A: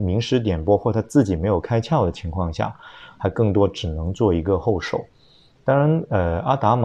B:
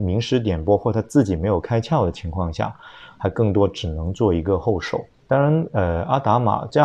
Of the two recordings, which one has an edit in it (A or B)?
B